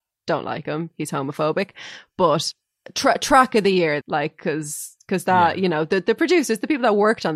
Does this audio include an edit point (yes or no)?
yes